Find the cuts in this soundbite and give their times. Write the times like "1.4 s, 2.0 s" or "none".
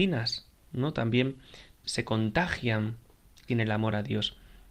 1.8 s, 3.5 s